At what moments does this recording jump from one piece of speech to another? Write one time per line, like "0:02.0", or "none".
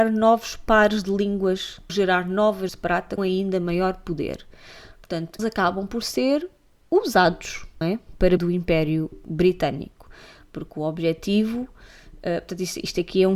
0:01.9
0:02.7
0:03.2
0:05.4
0:07.8
0:08.4

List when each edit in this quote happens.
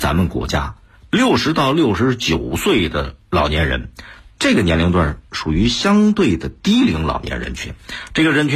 0:04.3

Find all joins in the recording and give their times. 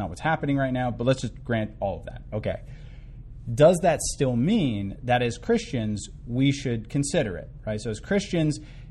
none

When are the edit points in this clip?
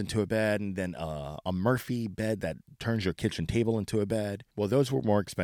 0:04.5

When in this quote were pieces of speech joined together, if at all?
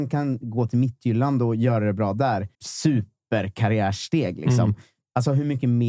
0:02.5

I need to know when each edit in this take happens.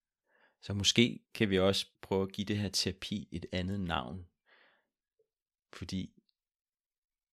0:01.2
0:01.9

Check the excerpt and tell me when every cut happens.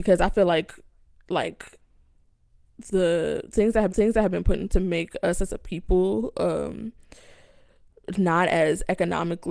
0:03.9
0:04.7

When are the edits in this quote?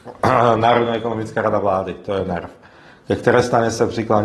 none

